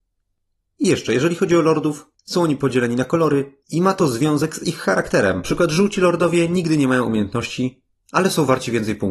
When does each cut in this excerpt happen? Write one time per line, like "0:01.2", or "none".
0:02.2
0:03.6
0:05.4